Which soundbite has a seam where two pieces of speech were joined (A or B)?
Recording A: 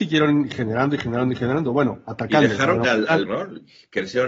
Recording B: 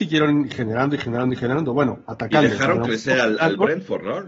A